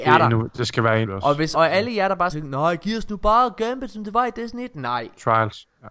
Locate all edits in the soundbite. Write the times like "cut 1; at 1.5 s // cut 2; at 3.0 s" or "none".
cut 1; at 1.0 s // cut 2; at 1.5 s // cut 3; at 2.3 s